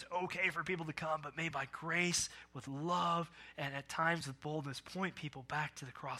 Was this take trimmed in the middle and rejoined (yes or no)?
no